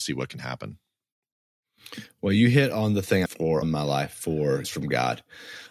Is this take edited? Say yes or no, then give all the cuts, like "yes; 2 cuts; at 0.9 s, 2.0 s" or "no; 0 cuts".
yes; 3 cuts; at 3.3 s, 3.6 s, 4.6 s